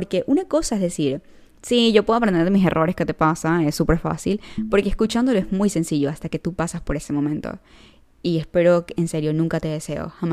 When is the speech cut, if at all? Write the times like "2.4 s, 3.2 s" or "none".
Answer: none